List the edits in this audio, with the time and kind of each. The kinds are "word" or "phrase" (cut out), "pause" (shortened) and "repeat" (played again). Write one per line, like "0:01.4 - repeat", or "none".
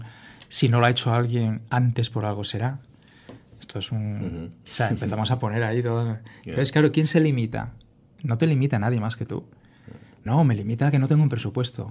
0:03.7 - phrase
0:10.3 - word

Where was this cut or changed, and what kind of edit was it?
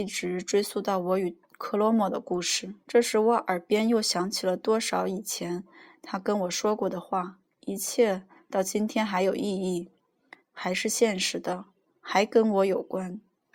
0:02.8 - pause
0:07.5 - pause
0:10.4 - pause

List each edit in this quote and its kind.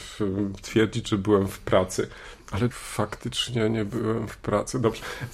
0:02.7 - word

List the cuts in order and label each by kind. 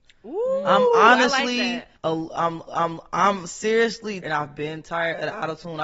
0:02.0 - pause
0:02.7 - repeat
0:04.2 - word

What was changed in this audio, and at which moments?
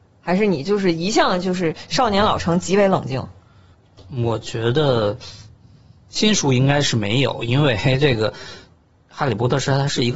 none

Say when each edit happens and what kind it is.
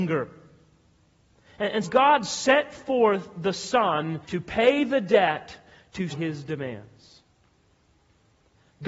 0:01.8 - word
0:04.2 - pause
0:06.1 - word

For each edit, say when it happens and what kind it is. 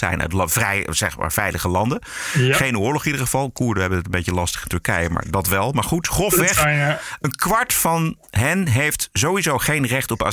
none

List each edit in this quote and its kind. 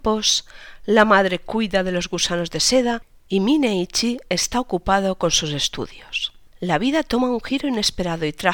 none

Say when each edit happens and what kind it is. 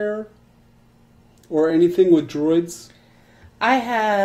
none

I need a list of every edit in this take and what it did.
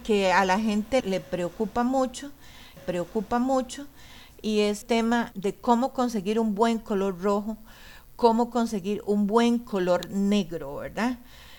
0:01.0 - word
0:02.8 - repeat
0:04.8 - word
0:05.3 - word

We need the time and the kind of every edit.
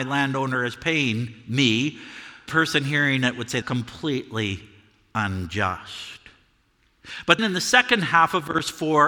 0:02.5 - word
0:03.6 - word
0:07.4 - word

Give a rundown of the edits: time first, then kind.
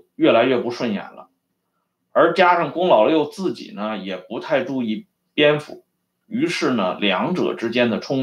none

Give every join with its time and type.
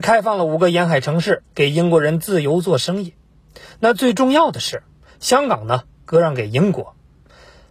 none

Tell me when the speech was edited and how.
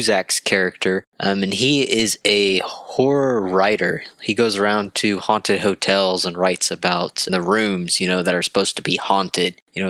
0:07.3 - phrase

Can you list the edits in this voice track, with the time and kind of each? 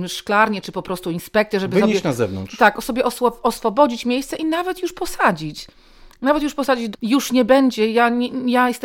0:06.9 - word

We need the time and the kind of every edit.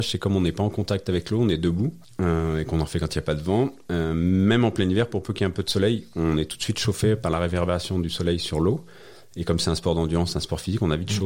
0:02.0 - pause

